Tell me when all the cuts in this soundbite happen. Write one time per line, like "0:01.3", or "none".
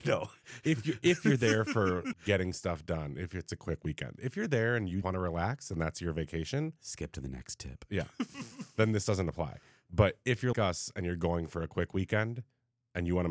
0:02.1
0:05.0
0:10.5